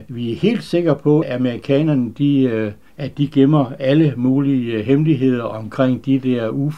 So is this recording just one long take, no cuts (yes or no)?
no